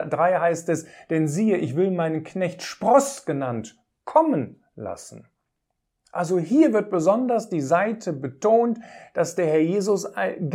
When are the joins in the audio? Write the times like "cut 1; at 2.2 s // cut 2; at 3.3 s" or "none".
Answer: none